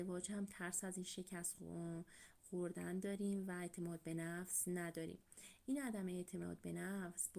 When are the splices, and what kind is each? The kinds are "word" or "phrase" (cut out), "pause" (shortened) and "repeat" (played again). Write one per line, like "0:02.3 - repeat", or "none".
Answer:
none